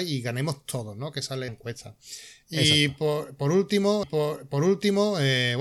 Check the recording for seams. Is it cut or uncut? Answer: cut